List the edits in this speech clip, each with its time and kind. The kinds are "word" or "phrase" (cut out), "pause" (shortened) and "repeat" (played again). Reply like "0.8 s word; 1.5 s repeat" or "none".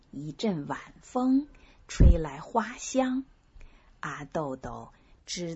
none